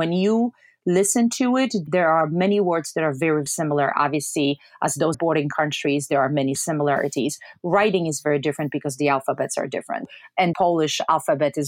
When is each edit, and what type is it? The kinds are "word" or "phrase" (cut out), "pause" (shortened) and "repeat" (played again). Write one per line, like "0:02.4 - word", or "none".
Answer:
0:03.5 - word
0:05.1 - word
0:10.5 - word